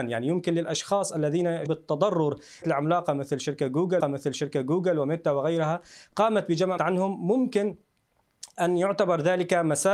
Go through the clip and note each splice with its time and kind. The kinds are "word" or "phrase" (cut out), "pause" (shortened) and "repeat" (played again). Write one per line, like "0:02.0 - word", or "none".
0:01.7 - word
0:02.6 - phrase
0:04.0 - repeat
0:06.8 - word